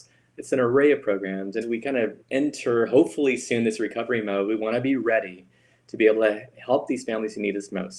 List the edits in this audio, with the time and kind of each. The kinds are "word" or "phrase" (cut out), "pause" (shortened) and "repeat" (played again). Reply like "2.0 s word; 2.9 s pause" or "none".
1.6 s word; 2.2 s pause